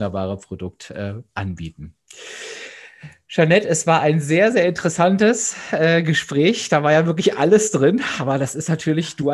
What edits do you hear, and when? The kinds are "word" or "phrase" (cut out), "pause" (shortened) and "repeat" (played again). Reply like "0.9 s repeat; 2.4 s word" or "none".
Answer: none